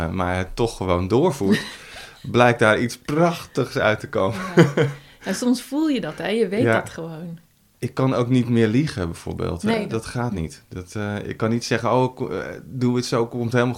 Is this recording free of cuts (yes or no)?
yes